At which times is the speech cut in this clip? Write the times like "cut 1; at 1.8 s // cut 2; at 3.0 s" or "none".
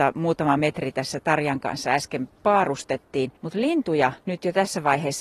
cut 1; at 3.4 s // cut 2; at 4.2 s